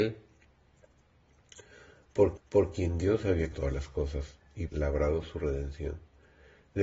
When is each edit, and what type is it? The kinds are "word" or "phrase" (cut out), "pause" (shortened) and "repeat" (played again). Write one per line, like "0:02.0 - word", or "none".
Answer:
0:02.4 - repeat
0:03.5 - word
0:04.7 - phrase